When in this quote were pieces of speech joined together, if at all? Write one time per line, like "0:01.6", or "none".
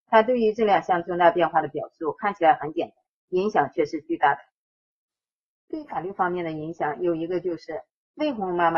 none